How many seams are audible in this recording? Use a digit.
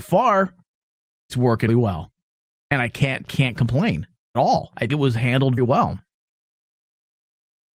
6